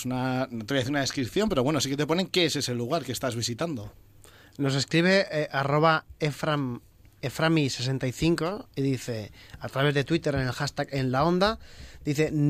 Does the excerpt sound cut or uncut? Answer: uncut